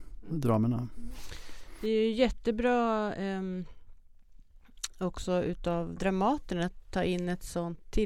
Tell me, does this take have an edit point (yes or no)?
no